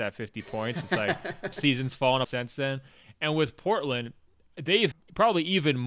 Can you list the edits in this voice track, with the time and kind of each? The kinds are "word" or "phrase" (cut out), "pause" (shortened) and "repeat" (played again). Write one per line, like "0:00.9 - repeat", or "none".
0:01.5 - word
0:02.2 - word
0:04.9 - word